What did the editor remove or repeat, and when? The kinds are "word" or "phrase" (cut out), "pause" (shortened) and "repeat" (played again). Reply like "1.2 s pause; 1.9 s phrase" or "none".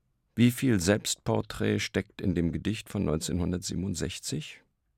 none